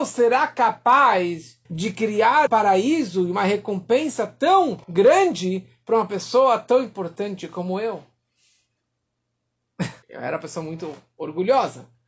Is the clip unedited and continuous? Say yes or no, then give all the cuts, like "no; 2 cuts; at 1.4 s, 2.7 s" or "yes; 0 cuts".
no; 4 cuts; at 1.7 s, 2.5 s, 4.8 s, 10.0 s